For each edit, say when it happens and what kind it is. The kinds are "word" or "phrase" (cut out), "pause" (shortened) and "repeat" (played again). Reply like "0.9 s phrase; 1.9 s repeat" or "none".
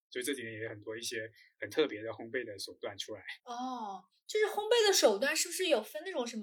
3.4 s pause